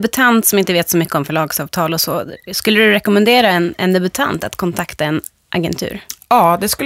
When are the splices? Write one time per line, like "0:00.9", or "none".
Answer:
none